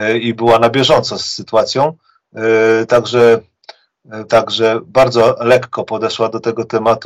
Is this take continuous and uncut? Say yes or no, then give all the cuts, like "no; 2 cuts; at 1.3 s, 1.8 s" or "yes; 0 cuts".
no; 1 cut; at 4.3 s